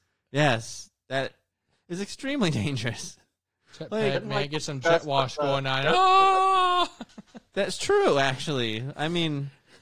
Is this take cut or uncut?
uncut